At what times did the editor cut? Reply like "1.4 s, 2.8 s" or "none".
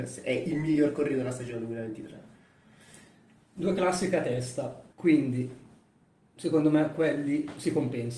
4.9 s